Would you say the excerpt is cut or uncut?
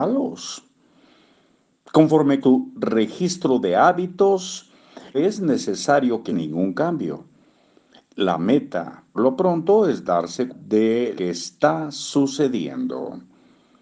cut